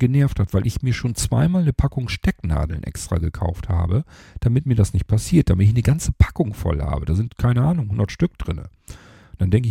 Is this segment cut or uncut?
uncut